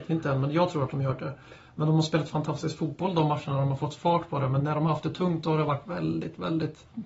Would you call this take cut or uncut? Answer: uncut